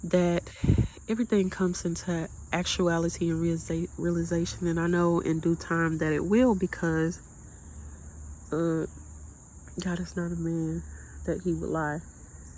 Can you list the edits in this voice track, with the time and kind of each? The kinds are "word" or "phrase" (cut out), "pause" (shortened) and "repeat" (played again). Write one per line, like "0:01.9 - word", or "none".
none